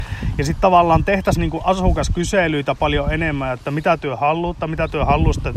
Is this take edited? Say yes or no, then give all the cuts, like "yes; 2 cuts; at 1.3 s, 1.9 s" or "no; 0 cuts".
no; 0 cuts